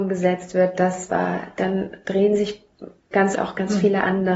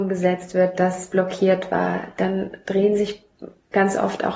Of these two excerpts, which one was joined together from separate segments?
first; 2 cuts; at 1.1 s, 3.3 s

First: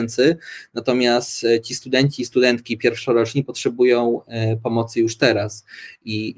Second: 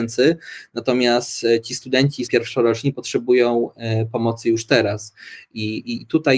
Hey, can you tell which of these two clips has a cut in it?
second; 1 cut; at 2.3 s

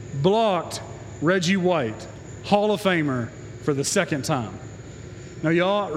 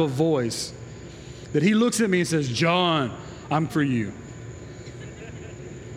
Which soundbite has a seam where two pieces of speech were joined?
second; 1 cut; at 3.7 s

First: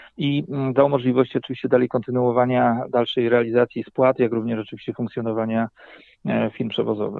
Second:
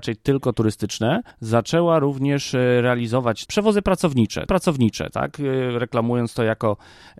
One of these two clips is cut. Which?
second; 3 cuts; at 1.3 s, 3.5 s, 4.5 s

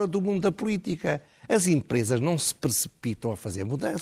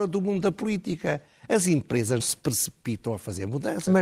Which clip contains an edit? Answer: second; 1 cut; at 2.2 s

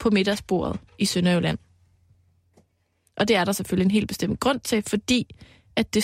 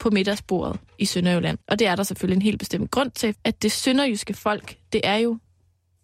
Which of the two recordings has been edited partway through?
second; 2 cuts; at 1.6 s, 3.3 s

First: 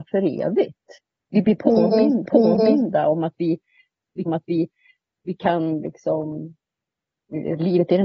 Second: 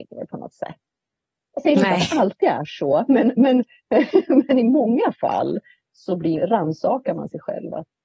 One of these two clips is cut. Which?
first; 2 cuts; at 2.2 s, 4.3 s

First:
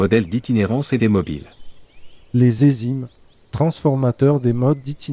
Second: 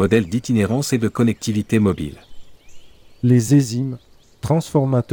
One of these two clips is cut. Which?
first; 2 cuts; at 1.0 s, 2.2 s

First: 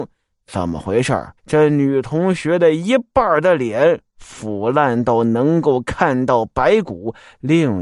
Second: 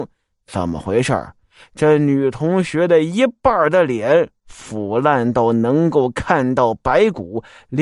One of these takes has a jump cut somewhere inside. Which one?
first; 1 cut; at 1.4 s

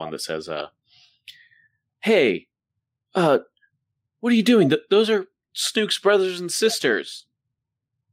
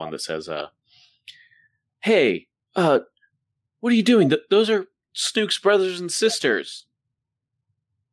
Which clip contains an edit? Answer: second; 1 cut; at 2.6 s

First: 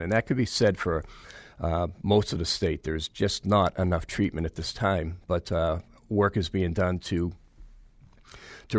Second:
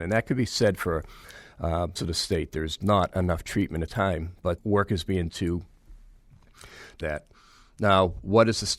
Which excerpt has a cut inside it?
second; 6 cuts; at 2.0 s, 2.8 s, 3.9 s, 4.6 s, 5.3 s, 7.0 s

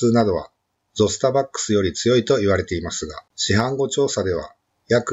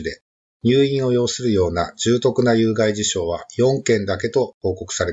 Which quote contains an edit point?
first; 1 cut; at 3.3 s

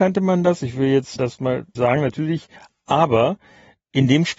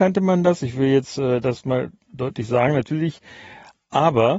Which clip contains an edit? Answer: first; 3 cuts; at 1.2 s, 1.8 s, 2.6 s

